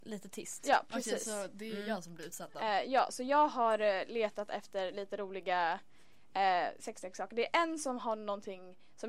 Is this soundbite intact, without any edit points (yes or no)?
yes